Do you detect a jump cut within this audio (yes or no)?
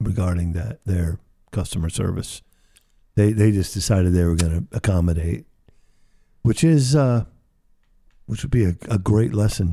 no